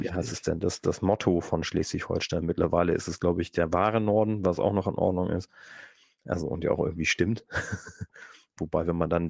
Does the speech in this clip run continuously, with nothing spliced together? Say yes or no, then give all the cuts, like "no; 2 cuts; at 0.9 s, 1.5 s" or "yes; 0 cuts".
yes; 0 cuts